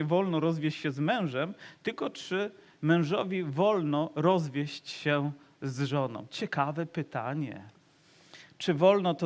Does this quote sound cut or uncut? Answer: uncut